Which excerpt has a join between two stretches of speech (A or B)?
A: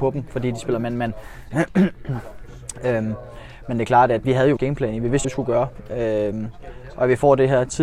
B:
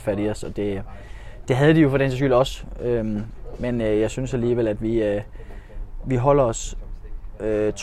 A